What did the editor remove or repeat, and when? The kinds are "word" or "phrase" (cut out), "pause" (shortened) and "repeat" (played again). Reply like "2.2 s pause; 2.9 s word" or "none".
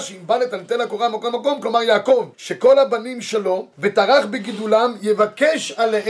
2.3 s pause; 3.7 s pause